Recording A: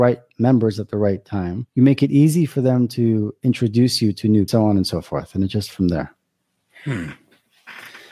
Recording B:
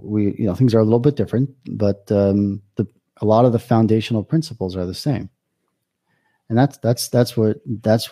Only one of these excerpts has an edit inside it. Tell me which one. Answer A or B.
A